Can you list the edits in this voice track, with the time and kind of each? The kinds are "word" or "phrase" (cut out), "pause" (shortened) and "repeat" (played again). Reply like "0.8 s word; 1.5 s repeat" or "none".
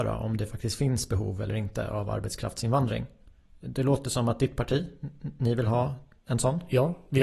none